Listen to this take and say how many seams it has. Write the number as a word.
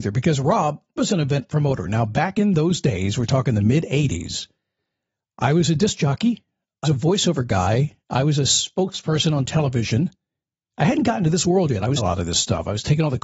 three